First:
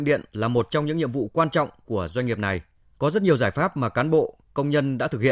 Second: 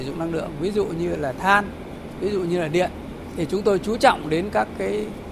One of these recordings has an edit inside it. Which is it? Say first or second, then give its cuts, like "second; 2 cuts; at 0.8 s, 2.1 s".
first; 1 cut; at 2.8 s